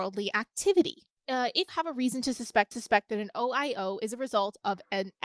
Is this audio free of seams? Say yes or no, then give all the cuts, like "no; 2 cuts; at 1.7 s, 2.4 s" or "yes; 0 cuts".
no; 3 cuts; at 1.2 s, 1.7 s, 2.7 s